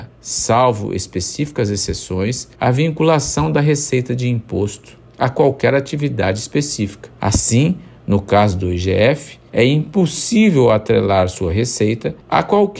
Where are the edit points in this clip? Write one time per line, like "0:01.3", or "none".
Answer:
0:02.5
0:05.1
0:07.2
0:09.5